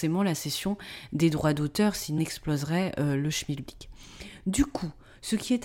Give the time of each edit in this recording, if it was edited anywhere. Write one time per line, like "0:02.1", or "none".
0:02.2